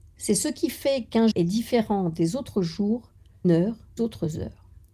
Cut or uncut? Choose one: cut